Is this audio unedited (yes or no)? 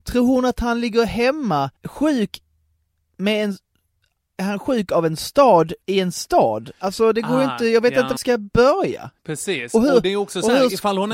no